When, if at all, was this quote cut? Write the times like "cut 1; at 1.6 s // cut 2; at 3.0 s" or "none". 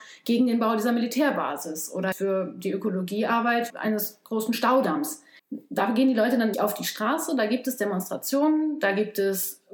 cut 1; at 2.1 s // cut 2; at 3.7 s // cut 3; at 5.4 s // cut 4; at 6.5 s